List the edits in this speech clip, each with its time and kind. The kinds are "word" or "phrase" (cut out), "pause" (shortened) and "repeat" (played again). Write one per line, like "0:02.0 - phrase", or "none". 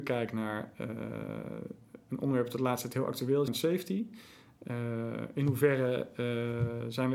0:03.5 - phrase